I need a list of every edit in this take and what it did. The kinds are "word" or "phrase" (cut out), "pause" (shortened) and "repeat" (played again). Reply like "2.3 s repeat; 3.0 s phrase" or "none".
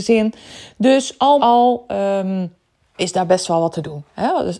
1.4 s word; 3.0 s word